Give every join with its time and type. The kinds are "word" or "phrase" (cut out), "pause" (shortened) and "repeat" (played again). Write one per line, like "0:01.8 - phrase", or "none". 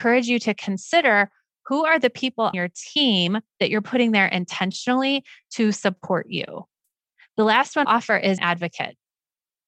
0:02.5 - word
0:07.8 - word
0:08.4 - word